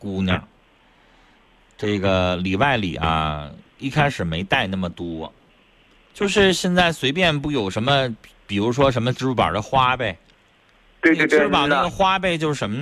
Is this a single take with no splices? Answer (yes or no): yes